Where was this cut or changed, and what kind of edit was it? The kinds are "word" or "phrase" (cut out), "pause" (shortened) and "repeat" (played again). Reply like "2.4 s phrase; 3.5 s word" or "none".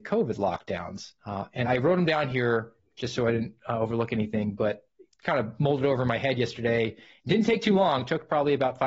1.2 s pause; 1.6 s word